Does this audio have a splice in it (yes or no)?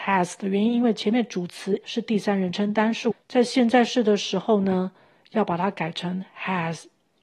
yes